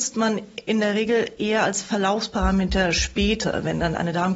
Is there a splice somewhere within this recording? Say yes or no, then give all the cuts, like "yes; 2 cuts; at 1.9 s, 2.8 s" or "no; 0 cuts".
no; 0 cuts